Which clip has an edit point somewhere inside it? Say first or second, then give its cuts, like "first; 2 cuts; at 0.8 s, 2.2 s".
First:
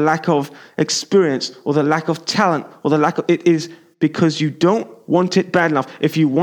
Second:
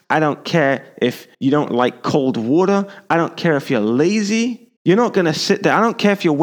second; 2 cuts; at 1.3 s, 4.8 s